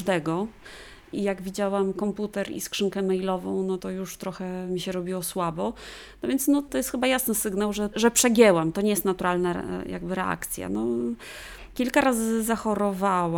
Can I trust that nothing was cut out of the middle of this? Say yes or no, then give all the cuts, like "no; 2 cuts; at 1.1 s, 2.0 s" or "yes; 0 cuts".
no; 1 cut; at 3.8 s